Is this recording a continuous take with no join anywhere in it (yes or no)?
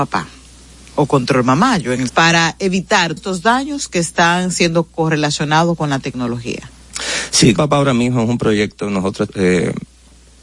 no